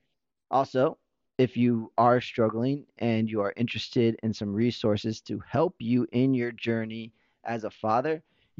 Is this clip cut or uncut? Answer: uncut